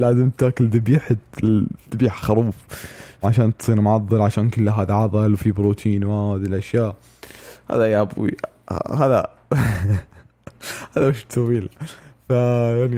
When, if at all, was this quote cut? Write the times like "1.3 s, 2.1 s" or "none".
3.2 s